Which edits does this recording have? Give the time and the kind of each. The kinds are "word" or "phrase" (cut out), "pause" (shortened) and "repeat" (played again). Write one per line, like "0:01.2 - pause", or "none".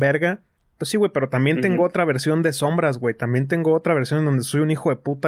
none